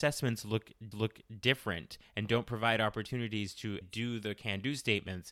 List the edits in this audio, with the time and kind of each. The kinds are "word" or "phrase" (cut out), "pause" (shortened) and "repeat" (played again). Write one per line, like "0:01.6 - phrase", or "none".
0:00.9 - repeat
0:03.8 - word